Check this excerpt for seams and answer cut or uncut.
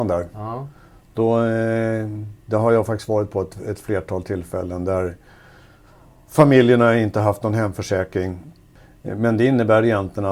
uncut